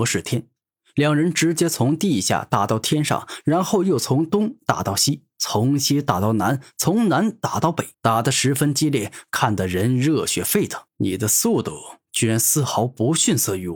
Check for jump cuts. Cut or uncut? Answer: cut